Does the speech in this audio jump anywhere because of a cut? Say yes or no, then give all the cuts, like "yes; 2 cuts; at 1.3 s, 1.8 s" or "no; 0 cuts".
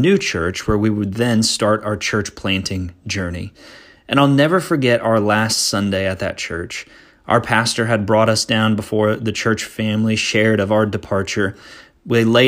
no; 0 cuts